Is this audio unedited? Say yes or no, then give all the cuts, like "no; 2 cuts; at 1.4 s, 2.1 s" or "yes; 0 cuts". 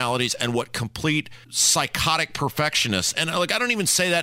no; 1 cut; at 1.4 s